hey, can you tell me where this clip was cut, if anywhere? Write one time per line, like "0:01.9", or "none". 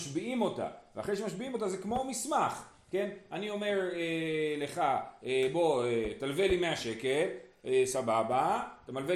none